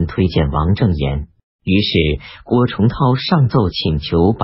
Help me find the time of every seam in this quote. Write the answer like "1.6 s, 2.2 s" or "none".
1.4 s